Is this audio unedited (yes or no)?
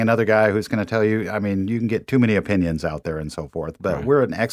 yes